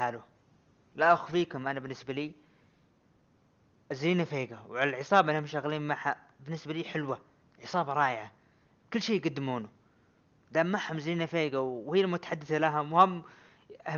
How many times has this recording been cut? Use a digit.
0